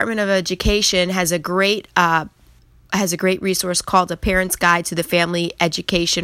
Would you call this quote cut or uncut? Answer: uncut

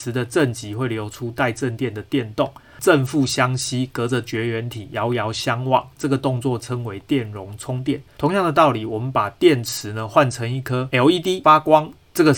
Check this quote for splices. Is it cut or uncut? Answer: cut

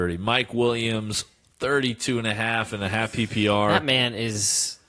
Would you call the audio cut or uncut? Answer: uncut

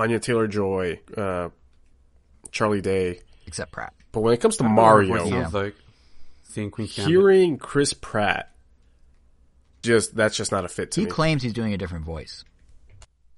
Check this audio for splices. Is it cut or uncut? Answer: cut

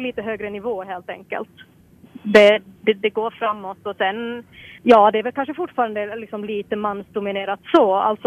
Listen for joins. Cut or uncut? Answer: cut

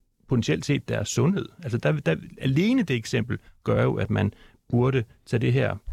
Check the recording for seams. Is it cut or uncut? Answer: uncut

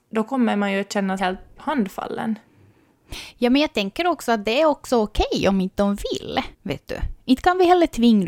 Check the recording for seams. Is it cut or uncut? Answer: cut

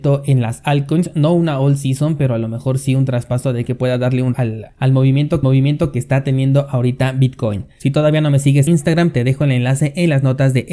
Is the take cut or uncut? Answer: cut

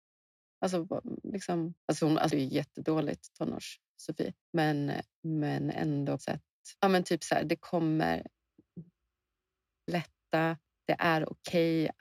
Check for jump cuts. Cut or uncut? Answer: cut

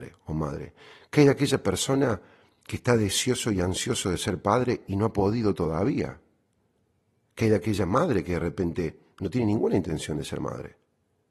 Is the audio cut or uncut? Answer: uncut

